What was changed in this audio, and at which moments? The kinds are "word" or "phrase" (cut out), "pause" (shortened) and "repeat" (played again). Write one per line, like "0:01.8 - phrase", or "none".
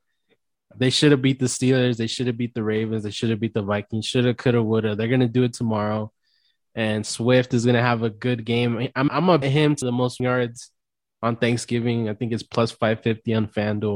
0:09.1 - word
0:09.4 - word
0:09.8 - word
0:10.2 - word